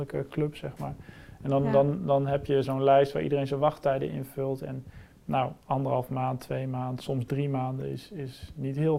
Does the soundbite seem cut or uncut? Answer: uncut